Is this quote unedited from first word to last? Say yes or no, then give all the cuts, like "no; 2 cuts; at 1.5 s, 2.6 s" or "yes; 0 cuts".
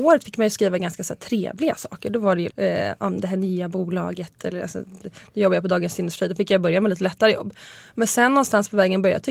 no; 1 cut; at 2.5 s